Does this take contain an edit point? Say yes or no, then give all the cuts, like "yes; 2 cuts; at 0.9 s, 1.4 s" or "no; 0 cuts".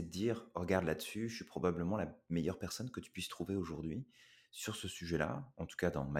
no; 0 cuts